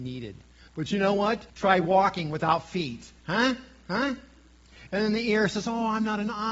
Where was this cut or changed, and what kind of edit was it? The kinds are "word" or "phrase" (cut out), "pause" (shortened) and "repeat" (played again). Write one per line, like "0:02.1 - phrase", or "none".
0:01.5 - pause